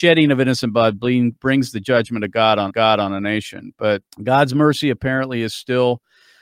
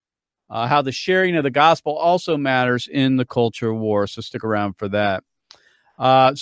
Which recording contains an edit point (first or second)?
first